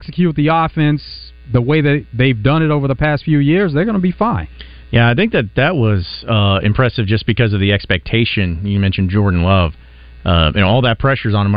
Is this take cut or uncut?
uncut